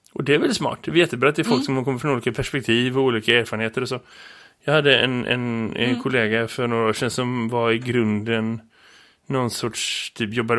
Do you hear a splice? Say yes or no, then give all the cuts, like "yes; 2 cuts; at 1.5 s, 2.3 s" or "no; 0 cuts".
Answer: no; 0 cuts